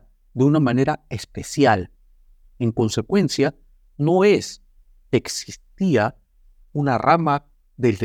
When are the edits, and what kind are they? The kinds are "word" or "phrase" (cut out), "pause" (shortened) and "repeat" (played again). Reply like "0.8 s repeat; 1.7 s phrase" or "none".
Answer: none